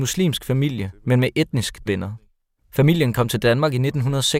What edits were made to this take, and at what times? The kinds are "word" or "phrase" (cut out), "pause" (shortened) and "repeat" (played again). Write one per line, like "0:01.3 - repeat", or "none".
0:01.9 - word